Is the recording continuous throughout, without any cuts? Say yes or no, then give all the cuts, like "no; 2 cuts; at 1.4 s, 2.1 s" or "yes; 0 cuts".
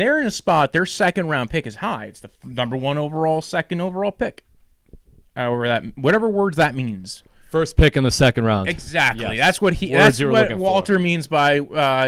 yes; 0 cuts